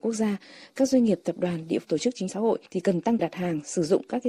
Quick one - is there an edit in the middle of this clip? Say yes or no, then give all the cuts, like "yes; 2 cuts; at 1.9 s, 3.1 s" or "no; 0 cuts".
yes; 4 cuts; at 1.8 s, 2.3 s, 2.7 s, 3.2 s